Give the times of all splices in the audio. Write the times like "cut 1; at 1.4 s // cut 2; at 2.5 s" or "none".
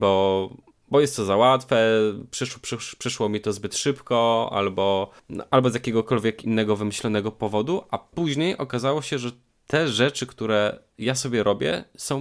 cut 1; at 5.2 s